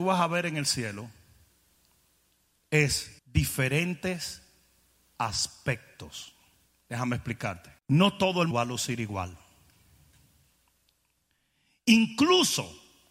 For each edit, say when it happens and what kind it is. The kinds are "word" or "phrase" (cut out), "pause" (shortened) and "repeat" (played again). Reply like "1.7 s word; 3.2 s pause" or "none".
3.2 s pause; 6.7 s pause; 7.8 s pause; 8.5 s word

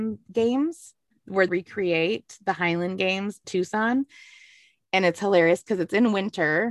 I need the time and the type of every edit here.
1.5 s word; 3.4 s word

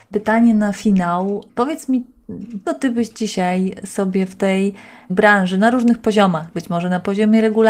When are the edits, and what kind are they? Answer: 2.6 s word

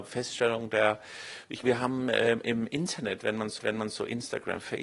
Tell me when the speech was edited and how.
1.6 s word; 3.6 s repeat

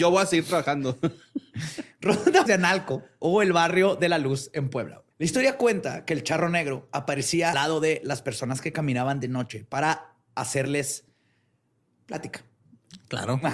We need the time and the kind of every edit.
2.5 s phrase; 5.1 s pause; 7.5 s word

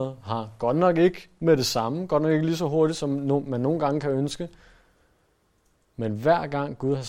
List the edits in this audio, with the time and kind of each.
none

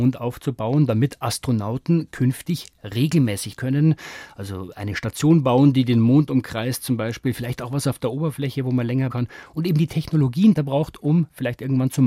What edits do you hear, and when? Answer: 3.6 s word; 9.1 s word; 10.6 s phrase

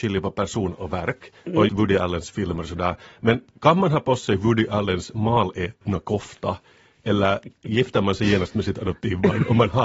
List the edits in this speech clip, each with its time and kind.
1.7 s word

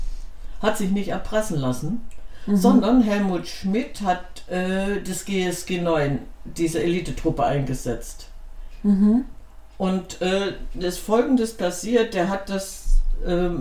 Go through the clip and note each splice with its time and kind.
none

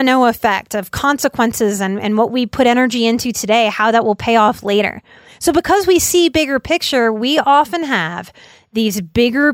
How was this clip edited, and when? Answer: none

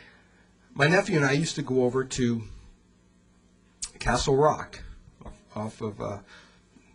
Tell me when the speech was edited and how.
5.3 s word

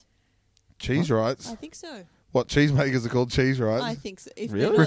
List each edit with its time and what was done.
none

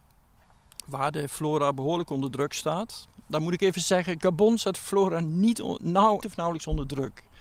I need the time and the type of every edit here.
6.2 s word

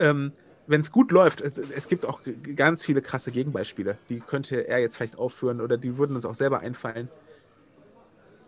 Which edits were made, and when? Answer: none

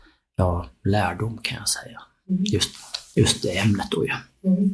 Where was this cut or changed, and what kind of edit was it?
none

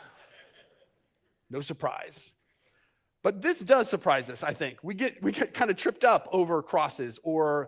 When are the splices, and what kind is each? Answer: none

